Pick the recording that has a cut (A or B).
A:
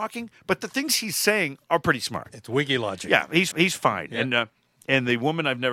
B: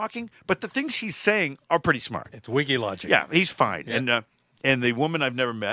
A